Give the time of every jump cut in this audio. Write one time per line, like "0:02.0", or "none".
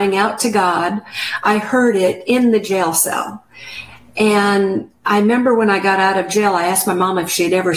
none